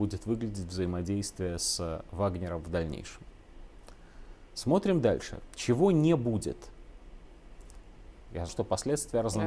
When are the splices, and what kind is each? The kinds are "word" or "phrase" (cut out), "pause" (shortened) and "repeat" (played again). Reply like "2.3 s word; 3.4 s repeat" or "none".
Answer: 8.5 s word